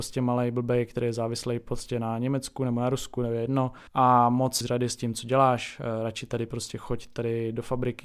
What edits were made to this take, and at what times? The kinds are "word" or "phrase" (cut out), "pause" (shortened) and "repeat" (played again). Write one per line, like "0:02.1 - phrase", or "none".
0:03.9 - pause
0:04.6 - phrase